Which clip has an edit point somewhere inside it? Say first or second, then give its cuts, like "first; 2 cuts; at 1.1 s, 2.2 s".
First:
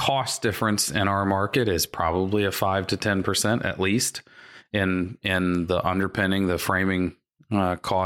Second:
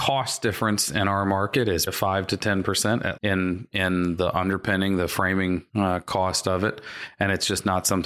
second; 3 cuts; at 1.9 s, 3.2 s, 5.7 s